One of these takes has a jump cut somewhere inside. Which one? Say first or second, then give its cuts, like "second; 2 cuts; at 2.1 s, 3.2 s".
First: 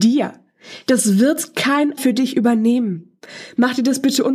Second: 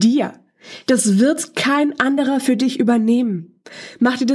first; 1 cut; at 2.0 s